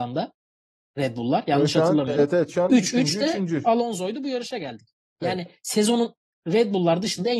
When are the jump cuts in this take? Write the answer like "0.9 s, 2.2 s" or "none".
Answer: none